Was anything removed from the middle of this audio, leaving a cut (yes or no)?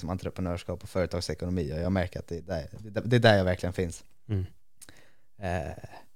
no